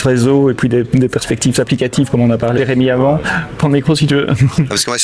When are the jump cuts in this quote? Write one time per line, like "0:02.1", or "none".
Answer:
0:01.5
0:02.6